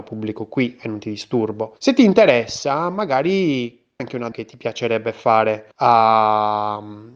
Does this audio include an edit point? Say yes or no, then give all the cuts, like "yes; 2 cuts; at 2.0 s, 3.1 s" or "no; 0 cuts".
yes; 4 cuts; at 1.8 s, 4.0 s, 4.3 s, 5.7 s